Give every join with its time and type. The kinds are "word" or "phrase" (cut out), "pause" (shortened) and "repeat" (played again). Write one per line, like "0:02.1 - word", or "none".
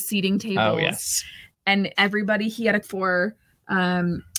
0:01.9 - word
0:02.8 - word